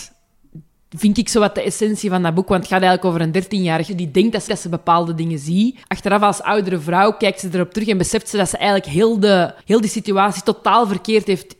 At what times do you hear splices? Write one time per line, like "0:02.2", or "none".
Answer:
0:03.9
0:04.5
0:05.8
0:09.6